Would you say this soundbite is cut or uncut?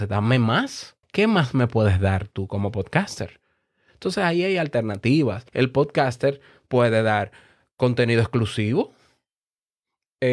cut